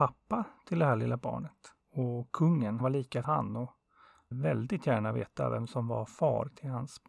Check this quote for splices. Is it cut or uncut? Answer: cut